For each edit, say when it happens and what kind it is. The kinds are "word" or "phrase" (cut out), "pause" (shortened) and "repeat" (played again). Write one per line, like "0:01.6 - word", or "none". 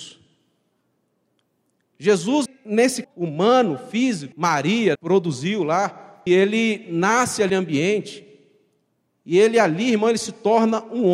0:02.5 - word
0:03.0 - word
0:04.3 - word
0:04.9 - word
0:06.3 - word
0:07.5 - word